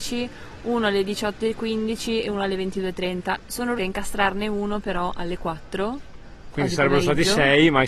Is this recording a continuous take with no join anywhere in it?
no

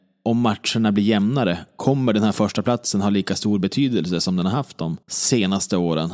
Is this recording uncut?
no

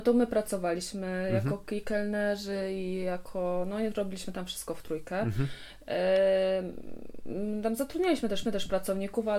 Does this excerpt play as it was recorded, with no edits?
no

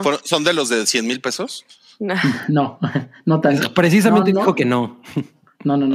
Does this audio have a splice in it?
no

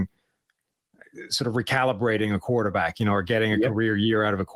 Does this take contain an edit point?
no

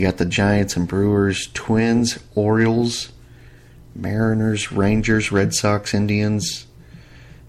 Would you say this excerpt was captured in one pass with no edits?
yes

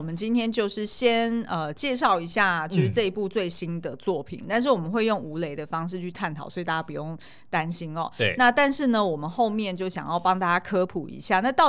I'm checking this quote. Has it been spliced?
no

